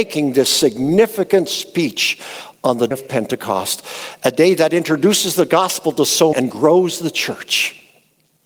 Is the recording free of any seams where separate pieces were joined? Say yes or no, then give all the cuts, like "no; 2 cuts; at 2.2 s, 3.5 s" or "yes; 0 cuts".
no; 2 cuts; at 2.9 s, 6.3 s